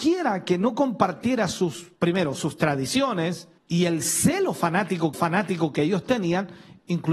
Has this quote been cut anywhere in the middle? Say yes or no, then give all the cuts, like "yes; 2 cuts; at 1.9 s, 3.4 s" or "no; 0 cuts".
yes; 3 cuts; at 2.0 s, 3.6 s, 5.1 s